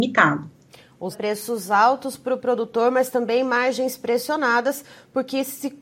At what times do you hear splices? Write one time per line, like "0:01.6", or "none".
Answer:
0:01.1